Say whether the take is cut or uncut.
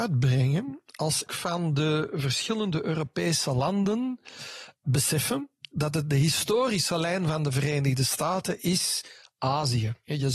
cut